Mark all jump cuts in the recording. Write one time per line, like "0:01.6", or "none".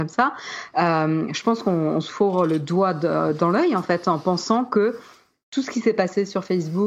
none